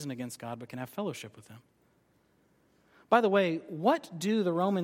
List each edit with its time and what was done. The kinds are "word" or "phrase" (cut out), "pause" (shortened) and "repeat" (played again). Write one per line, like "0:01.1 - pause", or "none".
none